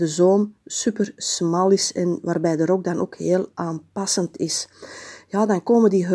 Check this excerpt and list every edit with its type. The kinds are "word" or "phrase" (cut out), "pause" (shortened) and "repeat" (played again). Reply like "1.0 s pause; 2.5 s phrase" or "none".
none